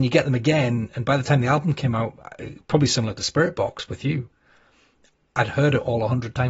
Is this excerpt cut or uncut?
uncut